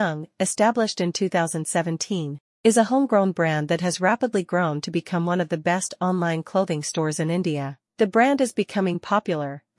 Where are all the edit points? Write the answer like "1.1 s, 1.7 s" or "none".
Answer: 7.9 s